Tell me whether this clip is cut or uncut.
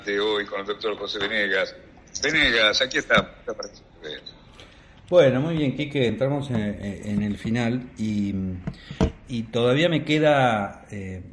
uncut